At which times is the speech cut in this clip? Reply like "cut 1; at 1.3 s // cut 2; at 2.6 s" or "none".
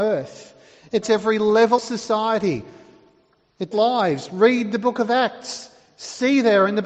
cut 1; at 1.0 s // cut 2; at 1.8 s // cut 3; at 3.7 s